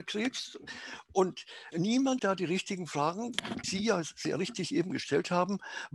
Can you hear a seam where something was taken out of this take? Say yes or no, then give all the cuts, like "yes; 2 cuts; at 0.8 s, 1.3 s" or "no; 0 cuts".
yes; 3 cuts; at 1.7 s, 2.2 s, 3.6 s